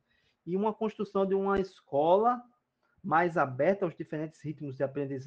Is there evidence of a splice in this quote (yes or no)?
no